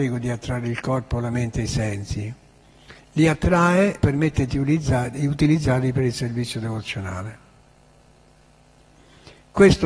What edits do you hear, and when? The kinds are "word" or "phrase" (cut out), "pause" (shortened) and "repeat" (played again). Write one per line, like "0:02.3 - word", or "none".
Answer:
0:04.0 - word